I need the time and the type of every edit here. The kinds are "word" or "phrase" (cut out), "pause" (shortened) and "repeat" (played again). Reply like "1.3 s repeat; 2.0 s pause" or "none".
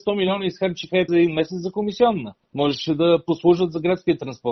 1.1 s word